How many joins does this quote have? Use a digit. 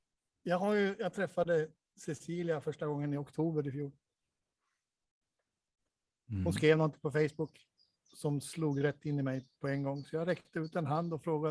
0